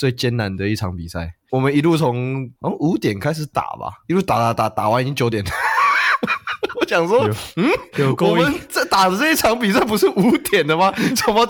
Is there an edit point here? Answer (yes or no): yes